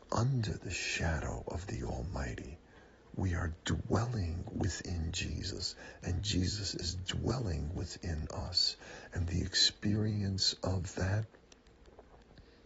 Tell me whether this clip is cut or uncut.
uncut